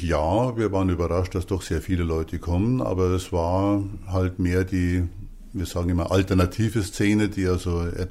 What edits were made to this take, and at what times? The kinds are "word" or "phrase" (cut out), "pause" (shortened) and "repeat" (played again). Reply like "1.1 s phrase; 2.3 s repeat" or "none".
none